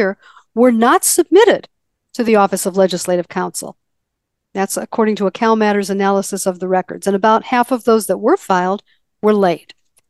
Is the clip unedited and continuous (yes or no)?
yes